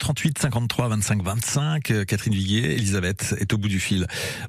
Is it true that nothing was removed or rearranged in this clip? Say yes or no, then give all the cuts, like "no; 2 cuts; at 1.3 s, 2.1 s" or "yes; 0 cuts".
yes; 0 cuts